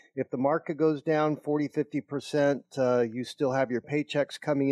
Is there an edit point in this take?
no; 0 cuts

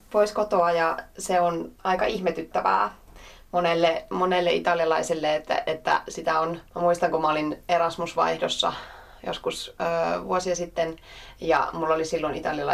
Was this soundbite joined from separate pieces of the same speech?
yes; 2 cuts; at 1.7 s, 6.7 s

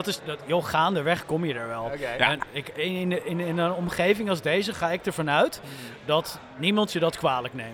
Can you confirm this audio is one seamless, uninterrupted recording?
yes; 0 cuts

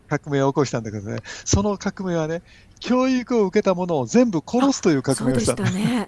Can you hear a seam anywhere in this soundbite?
no; 0 cuts

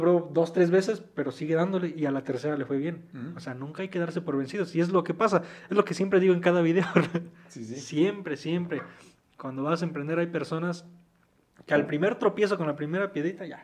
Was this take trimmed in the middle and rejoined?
no; 0 cuts

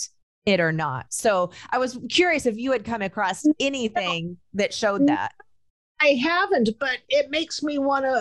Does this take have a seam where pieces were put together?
no; 0 cuts

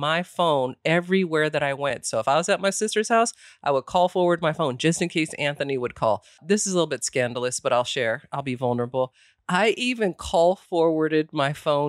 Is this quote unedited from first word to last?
yes; 0 cuts

